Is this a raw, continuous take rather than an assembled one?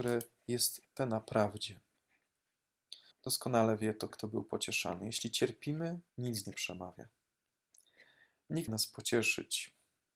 no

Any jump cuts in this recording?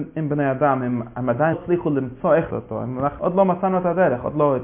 yes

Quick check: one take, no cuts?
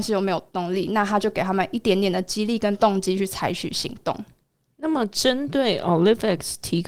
yes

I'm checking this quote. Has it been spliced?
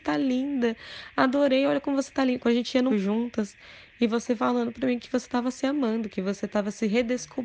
yes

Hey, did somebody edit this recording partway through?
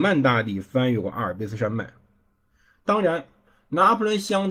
no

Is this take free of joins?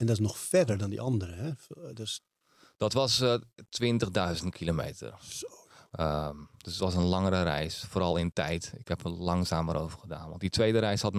yes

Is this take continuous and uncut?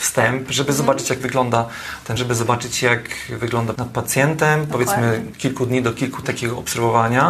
no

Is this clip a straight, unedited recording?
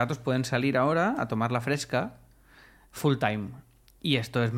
yes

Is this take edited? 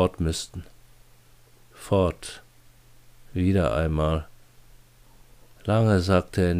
no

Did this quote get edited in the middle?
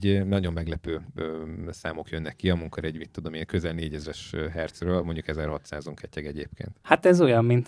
no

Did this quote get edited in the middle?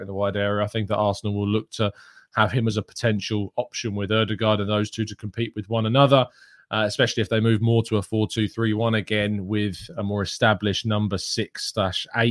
no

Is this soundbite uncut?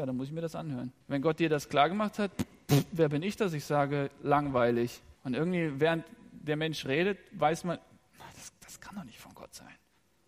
no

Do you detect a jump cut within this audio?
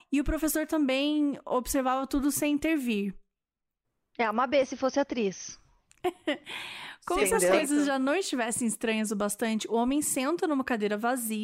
no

